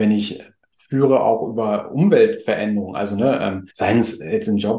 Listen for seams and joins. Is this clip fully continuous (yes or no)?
no